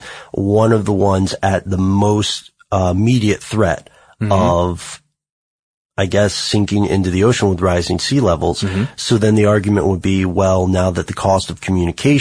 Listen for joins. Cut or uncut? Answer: uncut